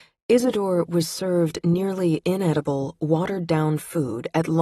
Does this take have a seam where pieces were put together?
no; 0 cuts

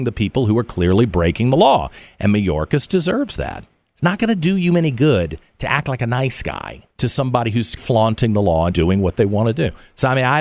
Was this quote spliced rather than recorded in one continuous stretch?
yes; 4 cuts; at 3.8 s, 6.9 s, 7.8 s, 8.7 s

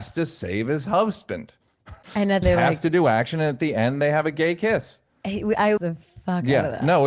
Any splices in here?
yes; 3 cuts; at 2.0 s, 2.4 s, 5.8 s

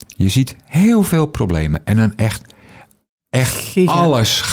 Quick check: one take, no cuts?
yes; 0 cuts

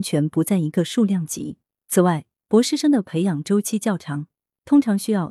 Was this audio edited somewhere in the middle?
no; 0 cuts

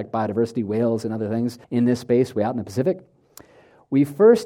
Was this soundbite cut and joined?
yes; 1 cut; at 1.6 s

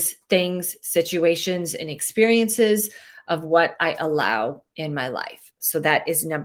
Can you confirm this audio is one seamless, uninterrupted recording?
yes; 0 cuts

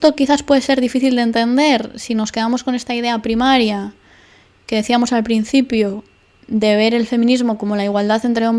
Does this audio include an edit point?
no; 0 cuts

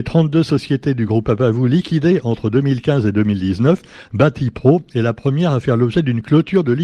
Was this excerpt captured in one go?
yes; 0 cuts

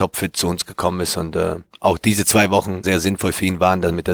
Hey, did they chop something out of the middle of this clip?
yes; 1 cut; at 2.8 s

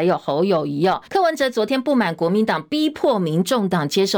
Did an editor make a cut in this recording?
yes; 1 cut; at 1.1 s

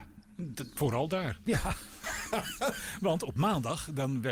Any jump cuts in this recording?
no; 0 cuts

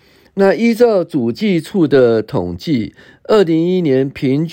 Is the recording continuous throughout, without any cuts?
yes; 0 cuts

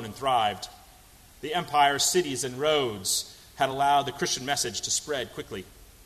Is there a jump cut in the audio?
no; 0 cuts

